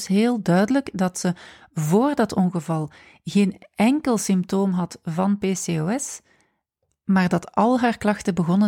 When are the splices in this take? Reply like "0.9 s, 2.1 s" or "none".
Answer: none